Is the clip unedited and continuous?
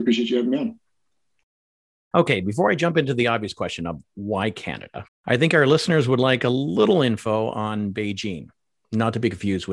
no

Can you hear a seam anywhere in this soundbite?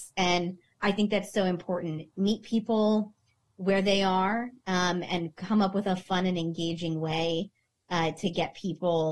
no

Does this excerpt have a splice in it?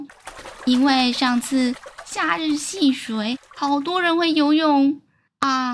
yes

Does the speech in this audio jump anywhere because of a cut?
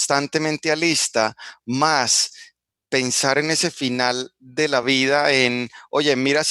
no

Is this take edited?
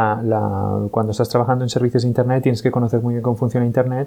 no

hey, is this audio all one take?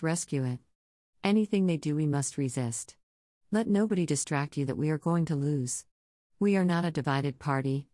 yes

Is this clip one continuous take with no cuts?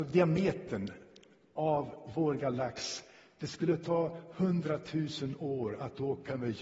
yes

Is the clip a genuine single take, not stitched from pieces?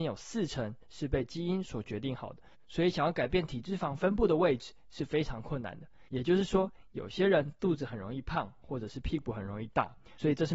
yes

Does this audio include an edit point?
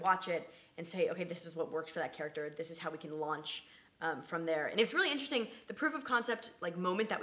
no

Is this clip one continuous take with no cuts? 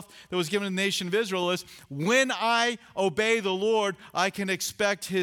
yes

